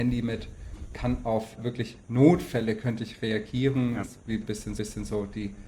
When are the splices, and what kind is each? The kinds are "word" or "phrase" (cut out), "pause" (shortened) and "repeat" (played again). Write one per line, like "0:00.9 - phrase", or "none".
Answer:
0:00.9 - word
0:01.6 - word
0:04.8 - repeat